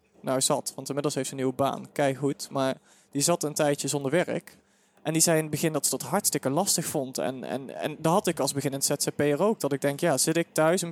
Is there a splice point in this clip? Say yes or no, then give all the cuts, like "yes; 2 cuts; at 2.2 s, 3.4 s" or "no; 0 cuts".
no; 0 cuts